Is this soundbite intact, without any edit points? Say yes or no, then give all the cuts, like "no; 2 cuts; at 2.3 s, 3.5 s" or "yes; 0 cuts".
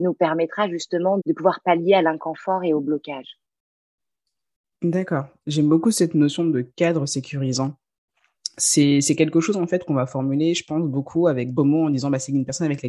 no; 2 cuts; at 1.2 s, 11.6 s